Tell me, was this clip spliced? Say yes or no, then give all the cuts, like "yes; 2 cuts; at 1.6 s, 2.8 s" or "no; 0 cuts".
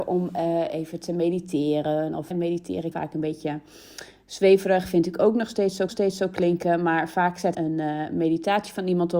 yes; 4 cuts; at 2.3 s, 2.9 s, 5.9 s, 7.5 s